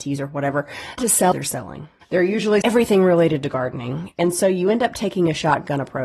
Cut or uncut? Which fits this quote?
cut